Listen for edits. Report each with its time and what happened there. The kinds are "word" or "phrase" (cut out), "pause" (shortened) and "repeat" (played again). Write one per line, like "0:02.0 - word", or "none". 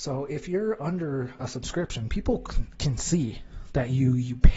none